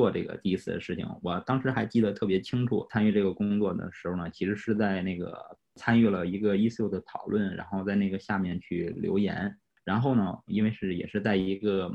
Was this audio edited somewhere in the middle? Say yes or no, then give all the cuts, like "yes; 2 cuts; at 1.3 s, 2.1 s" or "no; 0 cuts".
no; 0 cuts